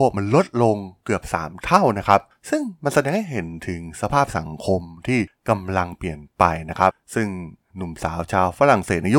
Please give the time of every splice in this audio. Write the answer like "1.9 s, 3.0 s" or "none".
none